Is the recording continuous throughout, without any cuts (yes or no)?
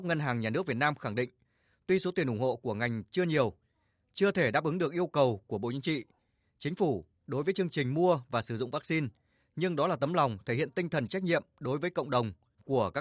yes